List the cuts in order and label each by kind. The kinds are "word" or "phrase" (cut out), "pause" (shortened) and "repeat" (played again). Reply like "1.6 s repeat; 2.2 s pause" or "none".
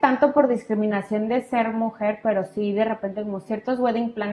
none